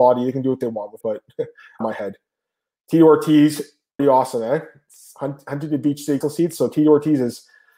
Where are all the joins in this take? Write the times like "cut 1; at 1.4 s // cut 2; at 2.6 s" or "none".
cut 1; at 1.0 s // cut 2; at 1.8 s // cut 3; at 4.0 s // cut 4; at 6.2 s